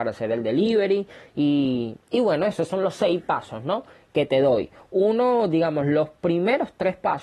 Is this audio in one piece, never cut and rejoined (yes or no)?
yes